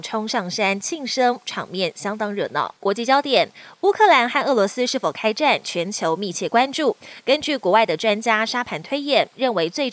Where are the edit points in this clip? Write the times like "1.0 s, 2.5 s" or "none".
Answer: 2.8 s